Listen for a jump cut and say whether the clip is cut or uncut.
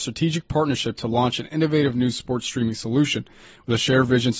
uncut